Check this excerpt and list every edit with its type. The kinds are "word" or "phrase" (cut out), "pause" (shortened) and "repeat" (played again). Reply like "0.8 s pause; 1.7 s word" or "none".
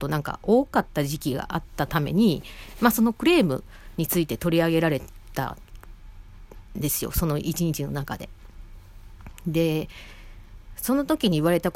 none